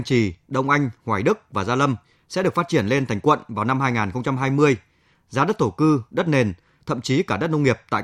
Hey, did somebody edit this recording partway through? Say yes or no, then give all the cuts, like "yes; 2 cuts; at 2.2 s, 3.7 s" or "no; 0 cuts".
no; 0 cuts